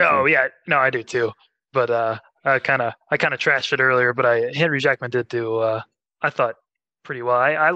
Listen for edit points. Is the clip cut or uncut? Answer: uncut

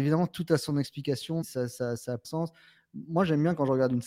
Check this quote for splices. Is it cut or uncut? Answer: cut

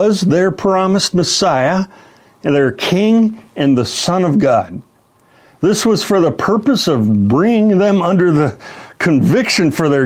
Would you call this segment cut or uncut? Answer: uncut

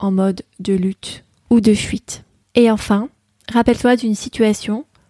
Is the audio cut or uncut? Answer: cut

